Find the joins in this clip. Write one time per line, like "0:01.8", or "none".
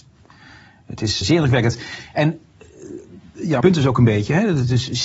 0:01.2
0:03.6